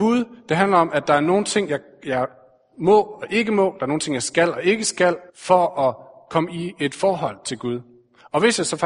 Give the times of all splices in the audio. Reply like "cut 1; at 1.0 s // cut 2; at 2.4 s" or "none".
cut 1; at 5.3 s